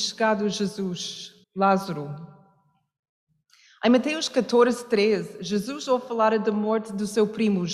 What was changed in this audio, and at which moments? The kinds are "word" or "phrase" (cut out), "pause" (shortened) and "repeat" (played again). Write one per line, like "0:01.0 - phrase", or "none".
0:01.4 - pause